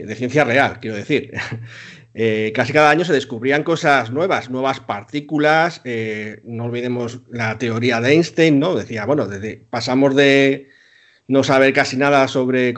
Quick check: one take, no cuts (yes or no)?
yes